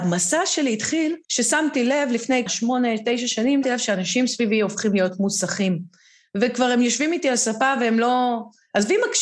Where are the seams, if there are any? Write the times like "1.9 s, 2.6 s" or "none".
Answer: 1.2 s, 2.5 s, 3.6 s